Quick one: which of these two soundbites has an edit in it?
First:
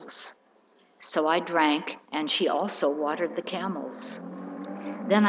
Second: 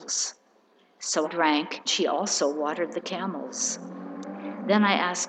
second; 2 cuts; at 1.2 s, 1.9 s

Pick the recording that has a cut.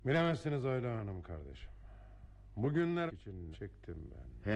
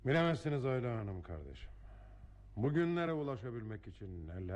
first; 2 cuts; at 3.1 s, 3.5 s

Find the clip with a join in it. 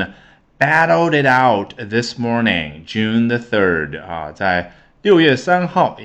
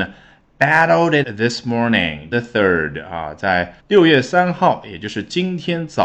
second; 3 cuts; at 1.2 s, 2.3 s, 3.8 s

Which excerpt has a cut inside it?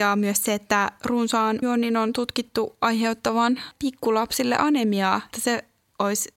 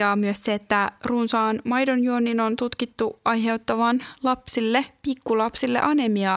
first; 3 cuts; at 1.6 s, 3.7 s, 5.3 s

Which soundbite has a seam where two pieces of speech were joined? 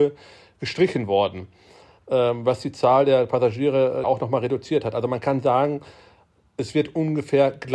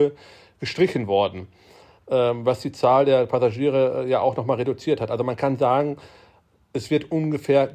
first; 1 cut; at 4.0 s

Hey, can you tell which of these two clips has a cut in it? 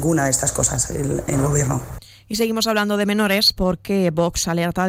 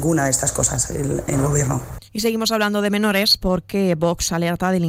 second; 1 cut; at 2.1 s

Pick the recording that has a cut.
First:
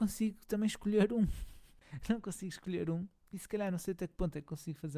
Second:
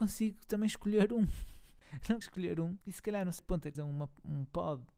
second; 4 cuts; at 2.2 s, 2.8 s, 3.4 s, 3.7 s

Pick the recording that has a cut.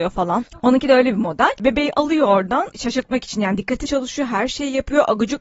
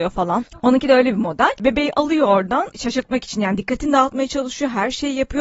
first; 1 cut; at 3.9 s

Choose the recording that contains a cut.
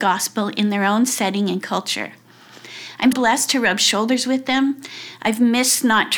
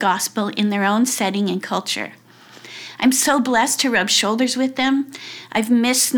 first; 1 cut; at 3.1 s

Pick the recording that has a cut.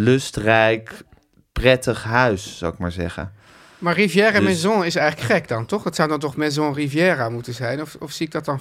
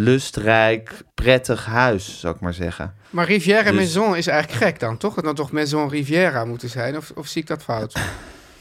second; 4 cuts; at 1.1 s, 3.0 s, 5.2 s, 7.6 s

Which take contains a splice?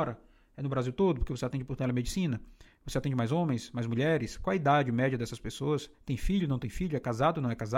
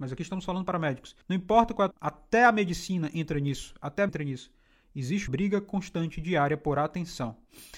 second; 4 cuts; at 1.2 s, 1.9 s, 4.1 s, 5.3 s

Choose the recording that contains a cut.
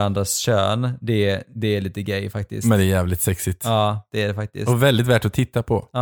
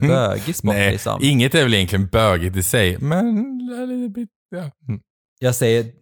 second; 1 cut; at 4.8 s

